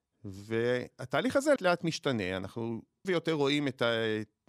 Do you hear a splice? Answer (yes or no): yes